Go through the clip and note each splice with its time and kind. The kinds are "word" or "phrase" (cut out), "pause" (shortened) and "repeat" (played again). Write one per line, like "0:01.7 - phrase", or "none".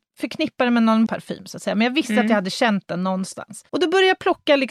0:01.1 - word
0:03.7 - pause